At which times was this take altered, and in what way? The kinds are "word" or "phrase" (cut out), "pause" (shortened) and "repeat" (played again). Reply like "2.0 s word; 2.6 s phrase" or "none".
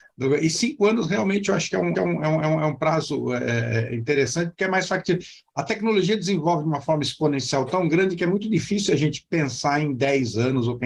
1.9 s repeat; 2.4 s repeat